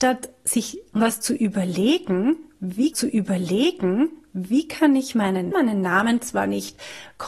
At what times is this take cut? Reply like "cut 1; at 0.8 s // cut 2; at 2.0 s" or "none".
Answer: cut 1; at 2.9 s // cut 2; at 5.5 s